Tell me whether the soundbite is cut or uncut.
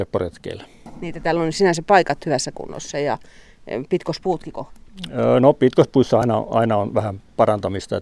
uncut